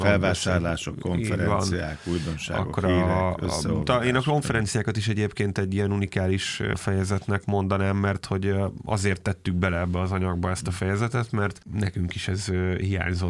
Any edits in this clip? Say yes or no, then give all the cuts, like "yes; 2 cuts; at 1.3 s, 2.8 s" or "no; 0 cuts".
no; 0 cuts